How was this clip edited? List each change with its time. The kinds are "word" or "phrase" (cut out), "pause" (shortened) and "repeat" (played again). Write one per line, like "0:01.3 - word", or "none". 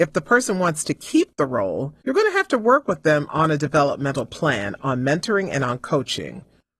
0:02.0 - pause